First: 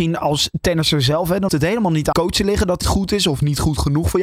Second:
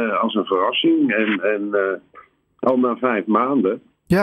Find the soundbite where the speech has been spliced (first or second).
first